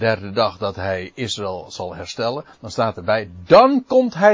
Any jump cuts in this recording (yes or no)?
no